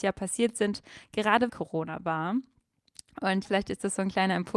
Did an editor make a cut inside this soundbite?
yes; 2 cuts; at 1.5 s, 3.4 s

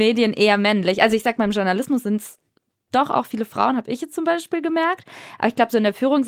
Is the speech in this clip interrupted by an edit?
no; 0 cuts

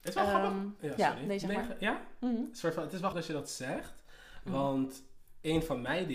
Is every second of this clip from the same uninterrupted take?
no; 1 cut; at 3.1 s

